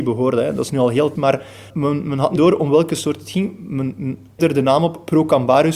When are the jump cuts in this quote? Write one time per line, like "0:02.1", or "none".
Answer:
0:01.2
0:01.7
0:02.4
0:04.4